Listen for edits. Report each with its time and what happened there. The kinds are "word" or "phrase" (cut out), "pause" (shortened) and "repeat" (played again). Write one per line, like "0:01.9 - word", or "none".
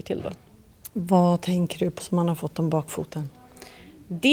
0:02.0 - word